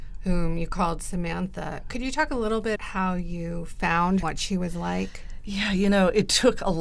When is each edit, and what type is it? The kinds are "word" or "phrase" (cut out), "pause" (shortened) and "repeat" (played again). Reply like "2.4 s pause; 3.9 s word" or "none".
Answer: 2.8 s word; 4.2 s phrase